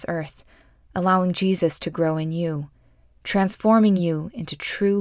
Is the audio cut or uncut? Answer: uncut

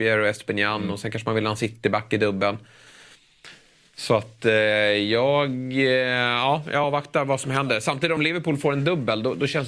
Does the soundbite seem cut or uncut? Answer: uncut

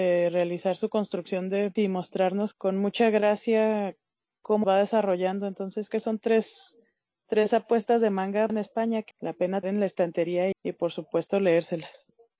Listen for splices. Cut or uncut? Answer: cut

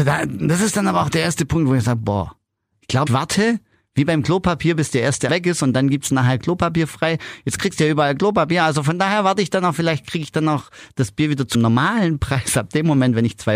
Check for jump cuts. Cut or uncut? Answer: cut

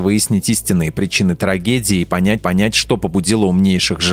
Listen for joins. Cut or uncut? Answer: cut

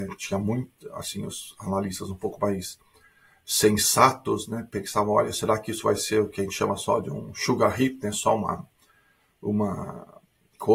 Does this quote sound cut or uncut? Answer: uncut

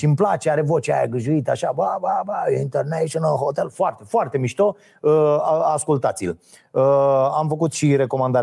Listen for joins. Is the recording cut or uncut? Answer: uncut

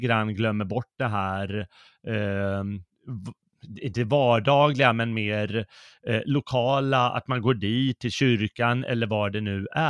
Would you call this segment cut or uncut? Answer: uncut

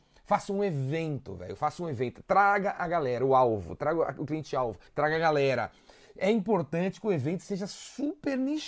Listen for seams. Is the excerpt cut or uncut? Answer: cut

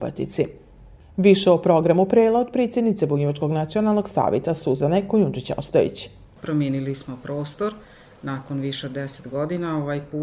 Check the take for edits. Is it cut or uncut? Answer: uncut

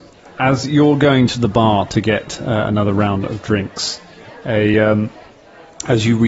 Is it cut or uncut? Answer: uncut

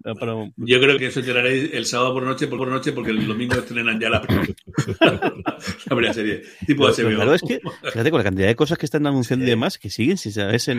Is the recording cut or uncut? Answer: cut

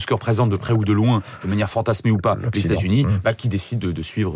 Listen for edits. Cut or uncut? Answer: uncut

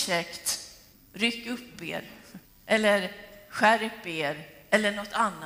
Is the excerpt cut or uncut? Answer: cut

